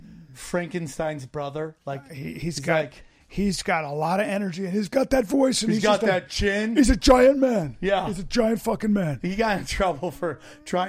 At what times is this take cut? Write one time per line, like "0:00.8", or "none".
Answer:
none